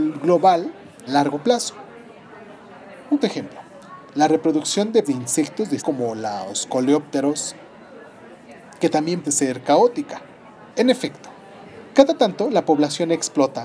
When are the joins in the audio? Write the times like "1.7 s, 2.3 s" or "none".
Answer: 1.1 s, 3.2 s, 5.0 s, 5.8 s, 9.2 s, 10.7 s